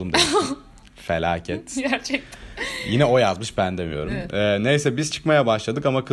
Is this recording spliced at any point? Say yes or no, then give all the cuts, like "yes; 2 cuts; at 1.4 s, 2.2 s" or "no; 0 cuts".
no; 0 cuts